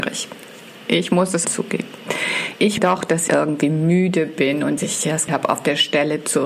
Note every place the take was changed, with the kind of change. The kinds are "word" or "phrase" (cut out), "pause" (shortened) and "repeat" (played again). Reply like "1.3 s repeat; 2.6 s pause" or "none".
1.4 s word; 2.8 s word; 3.3 s word; 4.8 s word; 5.3 s word